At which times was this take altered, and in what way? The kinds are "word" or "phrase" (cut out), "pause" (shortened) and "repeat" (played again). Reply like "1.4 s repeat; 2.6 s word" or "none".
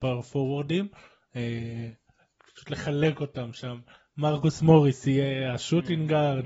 none